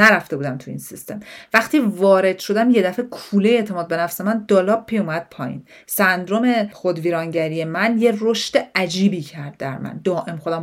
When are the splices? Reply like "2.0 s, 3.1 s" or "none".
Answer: none